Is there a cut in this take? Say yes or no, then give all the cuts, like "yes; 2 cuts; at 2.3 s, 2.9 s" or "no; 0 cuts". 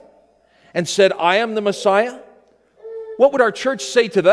no; 0 cuts